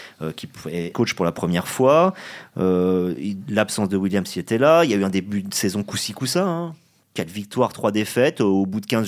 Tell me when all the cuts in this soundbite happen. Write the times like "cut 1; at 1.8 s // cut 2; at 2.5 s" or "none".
cut 1; at 0.9 s